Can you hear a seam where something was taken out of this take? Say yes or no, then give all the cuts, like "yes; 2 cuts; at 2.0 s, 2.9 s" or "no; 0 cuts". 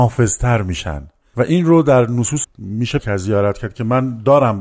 yes; 2 cuts; at 2.4 s, 3.0 s